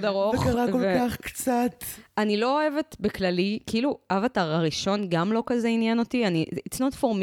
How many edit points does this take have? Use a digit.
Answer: 0